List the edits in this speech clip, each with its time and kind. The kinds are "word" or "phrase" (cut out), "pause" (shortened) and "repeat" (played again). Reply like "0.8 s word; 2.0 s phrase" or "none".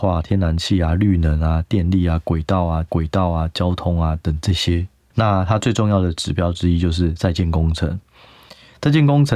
2.9 s repeat; 5.1 s word